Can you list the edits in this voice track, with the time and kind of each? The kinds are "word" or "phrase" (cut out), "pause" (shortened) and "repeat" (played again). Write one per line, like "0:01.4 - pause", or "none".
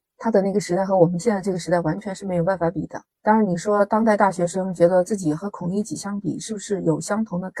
0:03.1 - pause